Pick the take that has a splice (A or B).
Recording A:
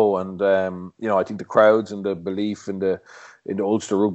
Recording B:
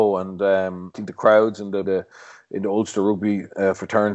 B